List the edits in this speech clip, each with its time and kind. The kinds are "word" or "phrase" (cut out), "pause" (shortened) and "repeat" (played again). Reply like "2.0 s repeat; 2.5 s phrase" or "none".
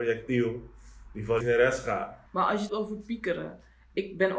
1.4 s word; 2.3 s pause; 2.7 s word